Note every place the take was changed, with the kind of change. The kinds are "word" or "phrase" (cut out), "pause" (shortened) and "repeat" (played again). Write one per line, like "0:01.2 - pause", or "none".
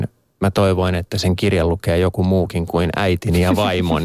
none